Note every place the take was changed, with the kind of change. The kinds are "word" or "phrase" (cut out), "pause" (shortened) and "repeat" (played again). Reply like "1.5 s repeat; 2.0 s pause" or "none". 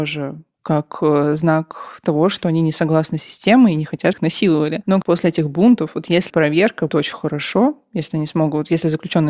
4.1 s word; 5.0 s phrase; 6.3 s word; 6.9 s word